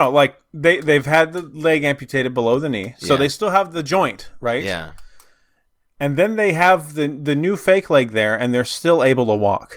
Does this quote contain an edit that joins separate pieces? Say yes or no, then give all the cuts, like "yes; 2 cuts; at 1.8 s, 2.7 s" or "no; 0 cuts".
no; 0 cuts